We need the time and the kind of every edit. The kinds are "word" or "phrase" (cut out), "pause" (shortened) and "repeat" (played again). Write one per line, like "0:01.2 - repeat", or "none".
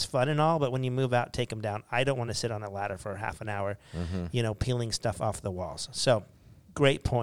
none